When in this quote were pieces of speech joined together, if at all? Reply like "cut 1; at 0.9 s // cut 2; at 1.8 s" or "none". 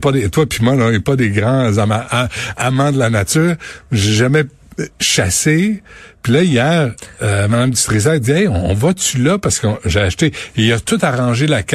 none